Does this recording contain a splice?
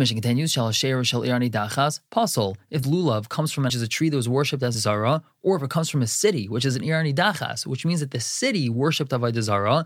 yes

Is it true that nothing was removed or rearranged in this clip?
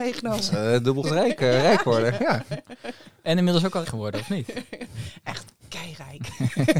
no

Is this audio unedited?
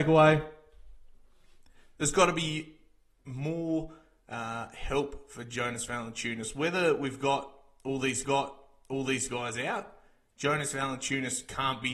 no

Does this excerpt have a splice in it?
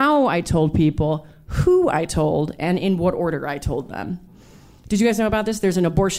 no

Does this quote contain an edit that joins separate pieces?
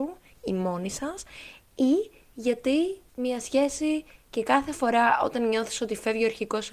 yes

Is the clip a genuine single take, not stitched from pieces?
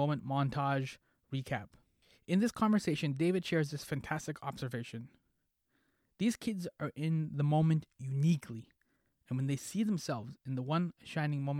yes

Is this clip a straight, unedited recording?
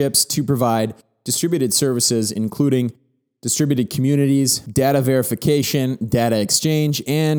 yes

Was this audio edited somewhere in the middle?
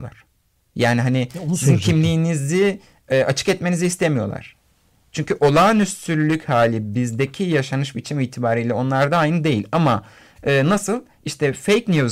no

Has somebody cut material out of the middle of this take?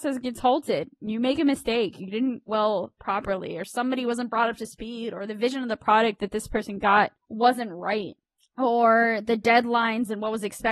yes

